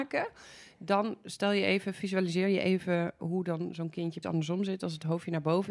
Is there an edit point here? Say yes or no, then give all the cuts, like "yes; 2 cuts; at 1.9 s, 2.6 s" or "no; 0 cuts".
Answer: yes; 2 cuts; at 3.2 s, 4.2 s